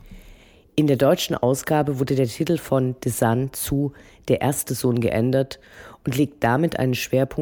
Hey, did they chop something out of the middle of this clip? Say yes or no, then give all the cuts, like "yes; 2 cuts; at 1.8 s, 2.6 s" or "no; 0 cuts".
no; 0 cuts